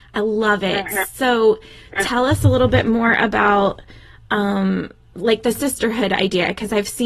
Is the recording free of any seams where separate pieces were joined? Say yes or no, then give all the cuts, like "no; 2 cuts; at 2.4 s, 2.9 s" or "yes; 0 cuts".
yes; 0 cuts